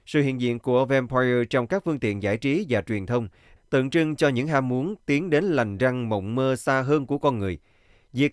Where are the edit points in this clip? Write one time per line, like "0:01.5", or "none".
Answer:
none